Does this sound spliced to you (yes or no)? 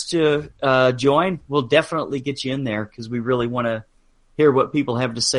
no